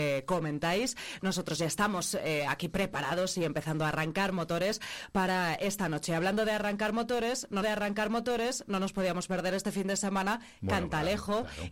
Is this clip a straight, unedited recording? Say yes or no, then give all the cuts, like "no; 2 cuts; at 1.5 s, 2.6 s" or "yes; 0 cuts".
no; 1 cut; at 7.6 s